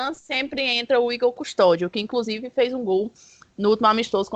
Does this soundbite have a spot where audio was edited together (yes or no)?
no